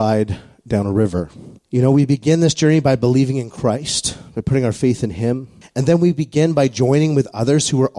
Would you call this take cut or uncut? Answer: cut